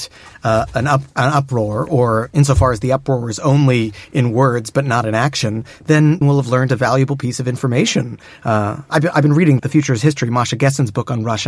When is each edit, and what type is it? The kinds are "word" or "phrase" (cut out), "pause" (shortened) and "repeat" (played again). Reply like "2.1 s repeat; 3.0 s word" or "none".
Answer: 6.2 s word; 9.6 s word